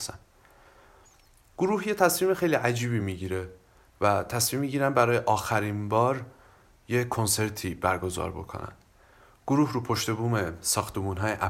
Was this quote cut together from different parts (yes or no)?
no